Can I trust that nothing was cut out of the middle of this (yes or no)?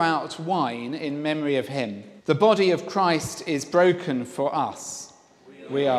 no